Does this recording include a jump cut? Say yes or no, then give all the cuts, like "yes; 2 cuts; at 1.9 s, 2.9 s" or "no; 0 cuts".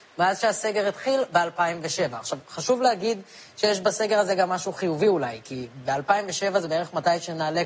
no; 0 cuts